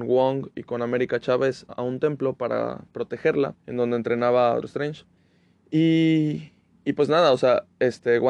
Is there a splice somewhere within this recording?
yes; 4 cuts; at 1.7 s, 3.6 s, 4.6 s, 5.2 s

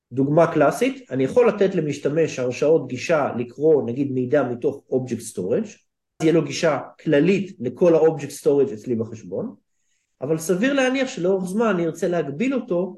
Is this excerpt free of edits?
no; 1 cut; at 6.2 s

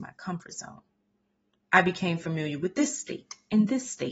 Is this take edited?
no; 0 cuts

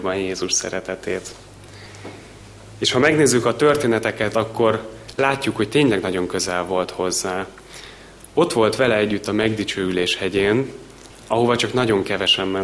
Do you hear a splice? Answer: no; 0 cuts

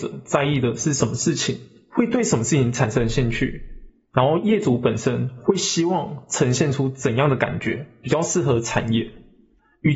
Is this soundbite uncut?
yes; 0 cuts

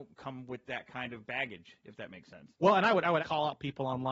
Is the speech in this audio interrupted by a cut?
yes; 2 cuts; at 2.6 s, 3.2 s

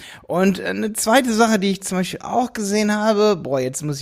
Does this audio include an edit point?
no; 0 cuts

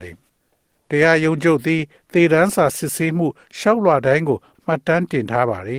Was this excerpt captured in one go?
yes; 0 cuts

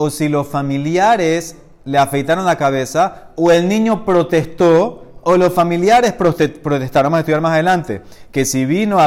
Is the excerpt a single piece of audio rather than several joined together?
yes; 0 cuts

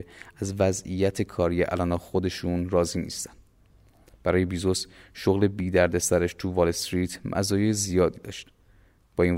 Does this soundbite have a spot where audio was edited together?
no; 0 cuts

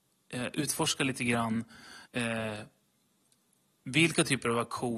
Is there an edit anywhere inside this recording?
yes; 1 cut; at 2.1 s

